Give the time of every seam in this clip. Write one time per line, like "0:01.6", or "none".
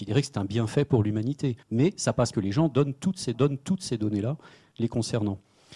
0:01.6
0:02.3
0:03.3

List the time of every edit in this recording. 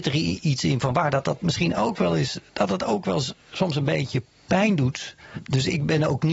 none

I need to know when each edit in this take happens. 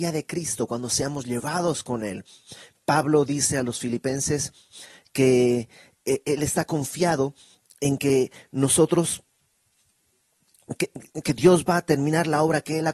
none

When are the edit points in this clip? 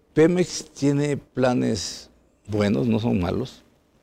0:01.3

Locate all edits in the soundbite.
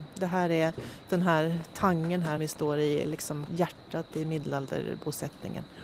0:01.1
0:02.4
0:03.0
0:03.5

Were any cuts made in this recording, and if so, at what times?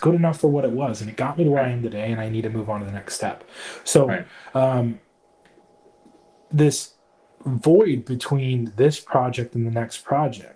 none

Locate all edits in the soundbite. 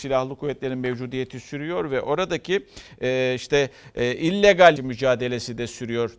0:04.8

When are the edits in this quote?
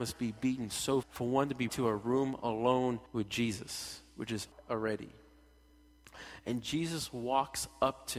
0:01.0
0:01.7
0:03.1
0:04.5

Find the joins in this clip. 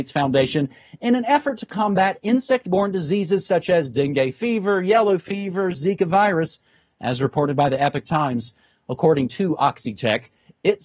none

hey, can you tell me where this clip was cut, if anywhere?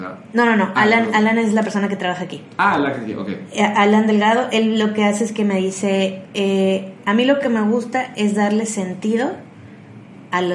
none

